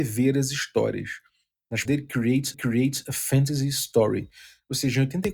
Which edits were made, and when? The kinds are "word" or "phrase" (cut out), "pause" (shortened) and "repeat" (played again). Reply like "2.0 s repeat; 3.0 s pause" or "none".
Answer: 1.9 s word; 2.5 s repeat